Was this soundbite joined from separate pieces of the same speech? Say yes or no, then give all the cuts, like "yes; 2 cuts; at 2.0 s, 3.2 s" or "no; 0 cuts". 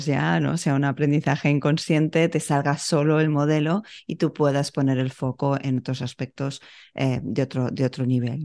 no; 0 cuts